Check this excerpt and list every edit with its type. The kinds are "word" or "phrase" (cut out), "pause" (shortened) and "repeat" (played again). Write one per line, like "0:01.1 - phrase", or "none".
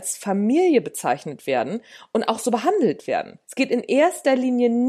0:03.4 - pause